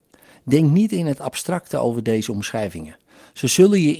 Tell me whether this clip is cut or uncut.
uncut